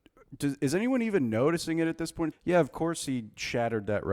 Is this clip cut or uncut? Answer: cut